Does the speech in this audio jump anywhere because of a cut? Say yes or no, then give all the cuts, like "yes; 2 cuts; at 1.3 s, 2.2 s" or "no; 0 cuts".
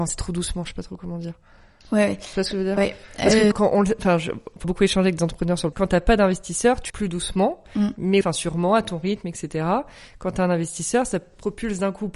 yes; 6 cuts; at 2.8 s, 3.5 s, 4.6 s, 5.7 s, 6.9 s, 8.2 s